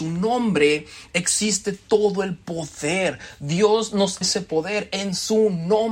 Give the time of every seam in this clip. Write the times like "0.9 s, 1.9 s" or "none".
4.2 s